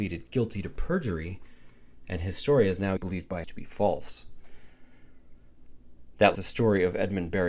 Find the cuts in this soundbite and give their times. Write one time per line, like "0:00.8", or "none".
0:03.0
0:03.4
0:06.3